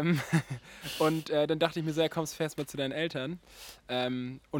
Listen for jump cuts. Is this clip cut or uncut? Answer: uncut